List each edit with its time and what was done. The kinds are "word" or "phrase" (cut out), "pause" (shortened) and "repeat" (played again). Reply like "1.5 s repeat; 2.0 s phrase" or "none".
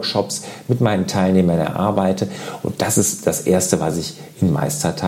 none